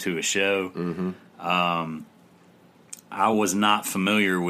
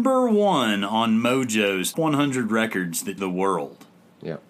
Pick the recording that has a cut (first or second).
second